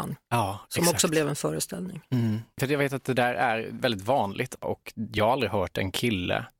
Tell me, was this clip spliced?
no; 0 cuts

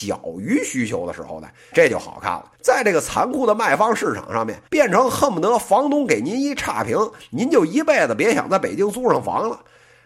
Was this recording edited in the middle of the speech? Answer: yes; 3 cuts; at 1.7 s, 2.5 s, 4.7 s

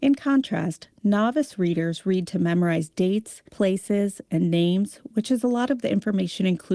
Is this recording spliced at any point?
yes; 1 cut; at 3.5 s

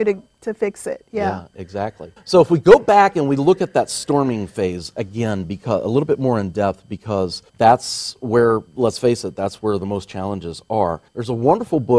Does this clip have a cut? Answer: yes; 4 cuts; at 2.2 s, 7.5 s, 8.7 s, 11.1 s

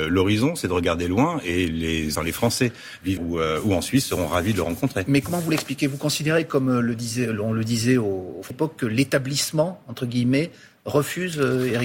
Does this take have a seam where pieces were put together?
yes; 3 cuts; at 2.2 s, 3.2 s, 8.5 s

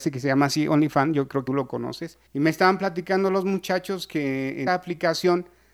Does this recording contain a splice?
yes; 3 cuts; at 1.5 s, 2.3 s, 4.7 s

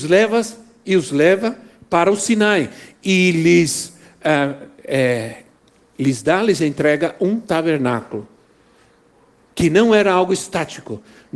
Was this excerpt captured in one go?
yes; 0 cuts

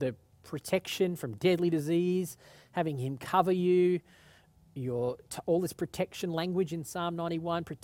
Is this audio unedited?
yes; 0 cuts

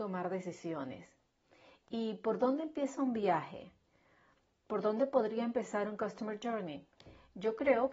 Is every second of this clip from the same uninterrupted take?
yes; 0 cuts

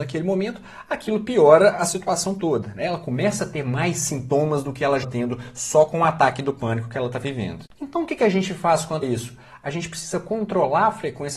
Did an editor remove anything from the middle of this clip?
yes; 3 cuts; at 5.0 s, 7.7 s, 9.0 s

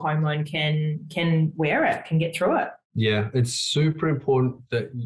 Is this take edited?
yes; 1 cut; at 2.8 s

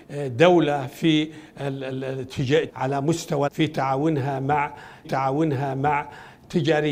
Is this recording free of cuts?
no; 3 cuts; at 2.7 s, 3.5 s, 5.0 s

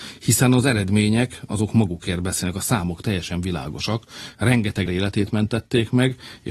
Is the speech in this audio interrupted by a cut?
yes; 1 cut; at 4.9 s

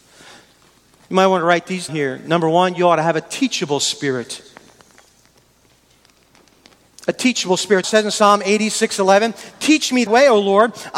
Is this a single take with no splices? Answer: no; 3 cuts; at 1.9 s, 7.8 s, 10.1 s

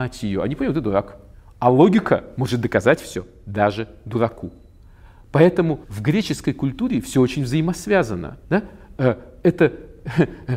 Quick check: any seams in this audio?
yes; 3 cuts; at 1.3 s, 5.8 s, 8.4 s

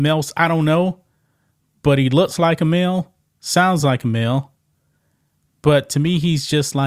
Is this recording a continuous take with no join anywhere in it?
yes; 0 cuts

